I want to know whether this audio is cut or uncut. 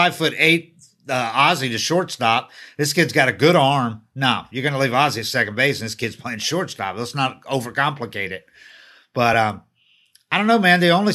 uncut